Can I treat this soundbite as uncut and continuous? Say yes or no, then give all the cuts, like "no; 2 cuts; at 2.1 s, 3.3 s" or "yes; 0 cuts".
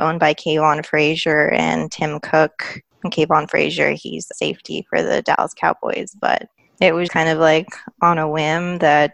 no; 2 cuts; at 4.3 s, 7.1 s